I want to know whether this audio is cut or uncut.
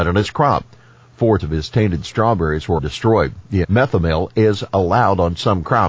cut